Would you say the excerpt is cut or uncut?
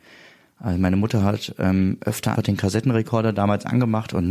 cut